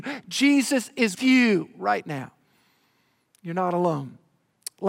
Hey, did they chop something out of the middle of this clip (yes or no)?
yes